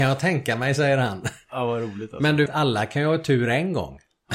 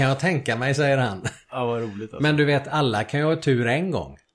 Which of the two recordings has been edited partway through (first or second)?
first